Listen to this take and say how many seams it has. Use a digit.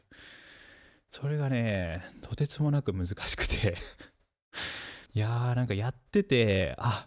1